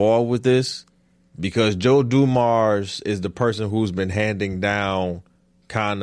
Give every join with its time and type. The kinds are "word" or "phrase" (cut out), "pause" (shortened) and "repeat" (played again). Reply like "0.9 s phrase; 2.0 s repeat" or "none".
none